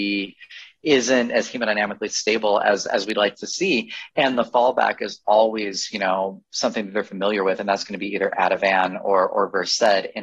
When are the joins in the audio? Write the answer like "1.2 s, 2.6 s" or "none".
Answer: none